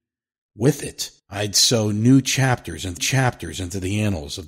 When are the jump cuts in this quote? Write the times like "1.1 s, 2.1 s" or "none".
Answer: 1.2 s, 3.0 s